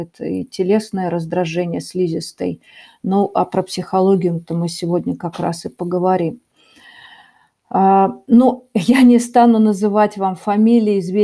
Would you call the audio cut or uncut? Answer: uncut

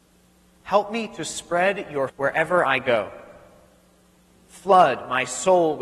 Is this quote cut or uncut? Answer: cut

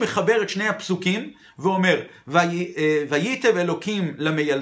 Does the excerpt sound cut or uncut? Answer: uncut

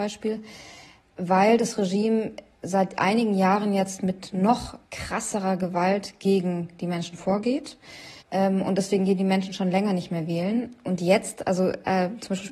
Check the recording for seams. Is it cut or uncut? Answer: cut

